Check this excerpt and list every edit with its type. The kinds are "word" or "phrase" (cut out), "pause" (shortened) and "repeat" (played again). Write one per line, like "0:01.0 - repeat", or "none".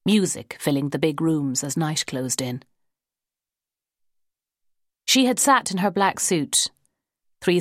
none

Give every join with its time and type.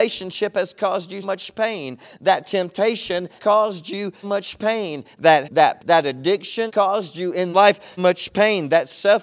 0:01.2 - word
0:03.4 - word
0:04.2 - word
0:05.4 - word
0:05.8 - word
0:06.7 - word
0:07.5 - word
0:08.0 - word

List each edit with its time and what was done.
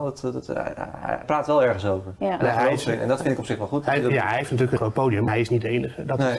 0:01.2 - phrase
0:04.8 - word
0:05.3 - word

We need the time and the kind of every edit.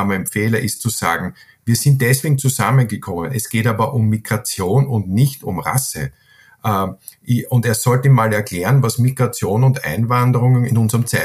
none

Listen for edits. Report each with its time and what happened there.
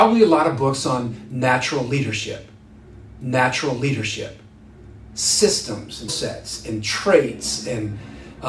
0:03.2 - repeat
0:06.1 - word

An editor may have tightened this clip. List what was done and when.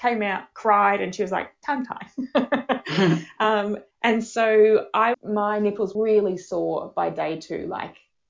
0:03.9 - pause
0:05.1 - word
0:05.9 - word

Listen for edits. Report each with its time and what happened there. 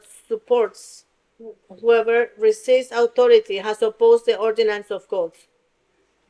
0:01.6 - pause

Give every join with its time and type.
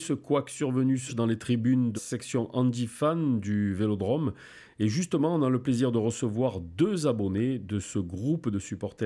0:01.1 - word
0:02.0 - word

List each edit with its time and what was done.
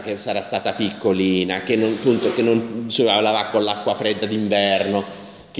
none

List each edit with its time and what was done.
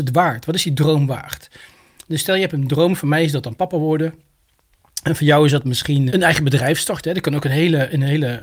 0:06.1 - word

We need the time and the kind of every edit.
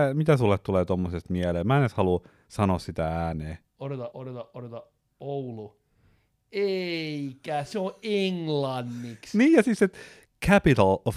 0:04.1 - word

